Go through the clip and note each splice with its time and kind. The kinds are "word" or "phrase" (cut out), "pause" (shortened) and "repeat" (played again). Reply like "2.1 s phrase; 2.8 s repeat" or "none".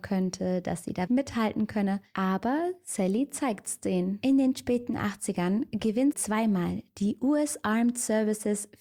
1.1 s word; 6.1 s word